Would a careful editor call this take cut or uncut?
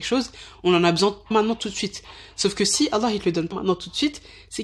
cut